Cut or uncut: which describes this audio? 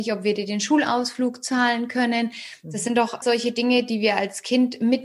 cut